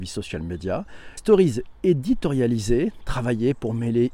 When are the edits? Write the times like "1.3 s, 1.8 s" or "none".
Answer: 1.2 s